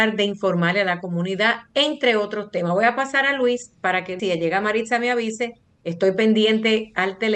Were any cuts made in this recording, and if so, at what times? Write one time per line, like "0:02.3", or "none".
0:04.2